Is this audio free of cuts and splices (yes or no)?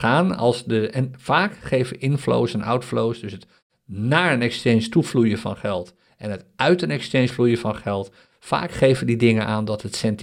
yes